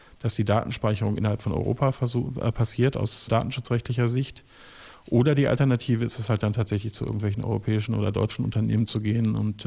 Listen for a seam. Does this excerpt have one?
yes; 1 cut; at 3.3 s

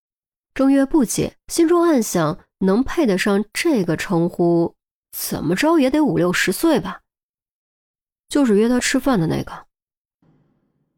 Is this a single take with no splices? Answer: no; 1 cut; at 1.4 s

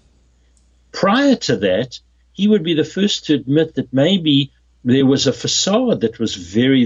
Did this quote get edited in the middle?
no; 0 cuts

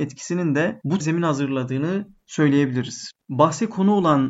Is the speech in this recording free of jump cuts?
no; 1 cut; at 1.0 s

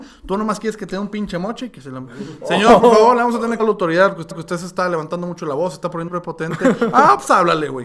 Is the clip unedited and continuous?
no; 3 cuts; at 3.6 s, 4.3 s, 6.1 s

